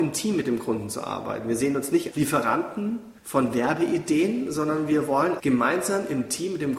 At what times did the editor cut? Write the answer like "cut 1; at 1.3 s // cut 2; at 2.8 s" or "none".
cut 1; at 2.1 s // cut 2; at 3.2 s // cut 3; at 5.4 s